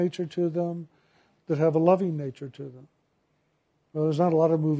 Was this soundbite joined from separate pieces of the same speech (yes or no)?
no